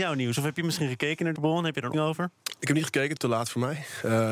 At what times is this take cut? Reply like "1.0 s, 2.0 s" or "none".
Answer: 1.4 s, 1.9 s, 3.2 s